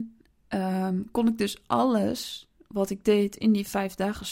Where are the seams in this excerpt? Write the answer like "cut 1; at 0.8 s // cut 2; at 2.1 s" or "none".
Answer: none